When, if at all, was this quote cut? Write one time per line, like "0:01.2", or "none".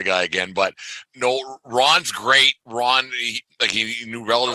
0:01.1
0:02.6